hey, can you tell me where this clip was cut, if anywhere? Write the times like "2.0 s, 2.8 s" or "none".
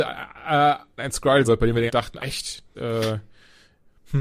1.0 s, 1.4 s, 1.9 s, 2.2 s, 2.7 s